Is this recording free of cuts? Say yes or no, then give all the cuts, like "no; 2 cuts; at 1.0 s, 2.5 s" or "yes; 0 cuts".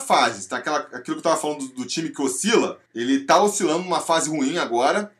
no; 1 cut; at 2.9 s